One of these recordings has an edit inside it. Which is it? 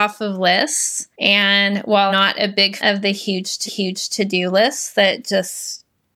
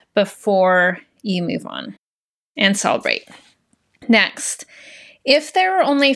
first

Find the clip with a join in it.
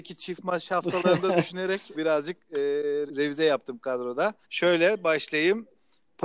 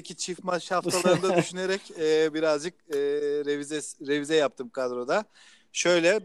first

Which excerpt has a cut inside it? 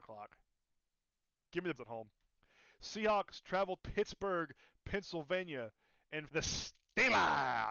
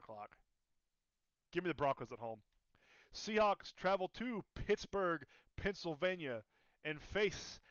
first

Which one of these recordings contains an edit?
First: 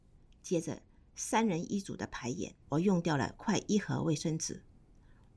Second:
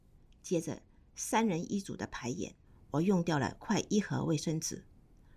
first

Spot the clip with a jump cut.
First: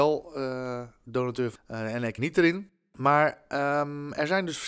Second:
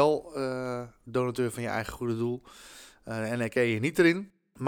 first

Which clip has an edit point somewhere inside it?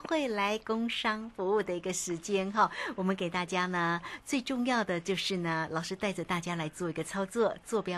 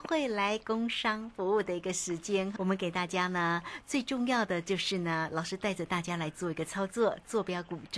second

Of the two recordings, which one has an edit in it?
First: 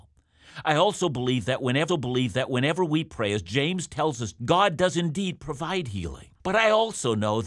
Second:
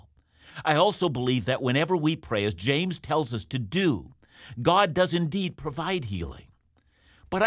first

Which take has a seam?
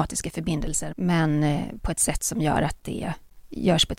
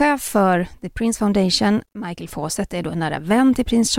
first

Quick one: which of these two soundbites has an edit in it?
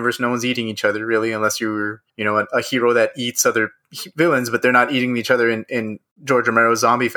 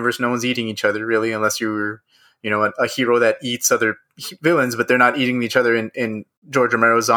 first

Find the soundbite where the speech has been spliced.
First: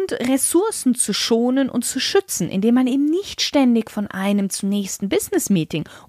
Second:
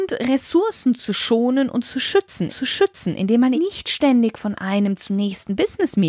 second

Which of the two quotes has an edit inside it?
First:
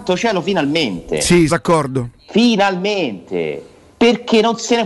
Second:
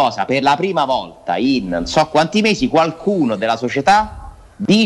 first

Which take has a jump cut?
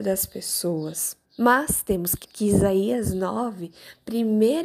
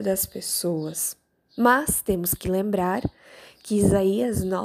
first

